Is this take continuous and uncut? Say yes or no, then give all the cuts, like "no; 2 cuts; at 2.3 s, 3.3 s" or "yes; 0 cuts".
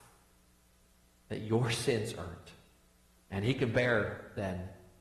yes; 0 cuts